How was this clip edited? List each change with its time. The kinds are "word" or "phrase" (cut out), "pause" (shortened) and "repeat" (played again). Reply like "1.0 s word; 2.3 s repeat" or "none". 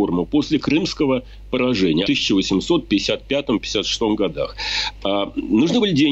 2.0 s phrase